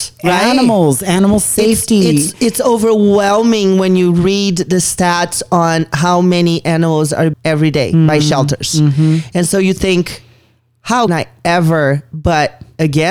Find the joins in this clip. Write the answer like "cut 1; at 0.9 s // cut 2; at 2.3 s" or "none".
cut 1; at 7.3 s // cut 2; at 11.1 s